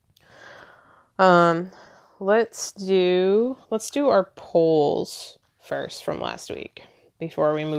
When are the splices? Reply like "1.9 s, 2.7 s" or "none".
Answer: 3.6 s, 5.4 s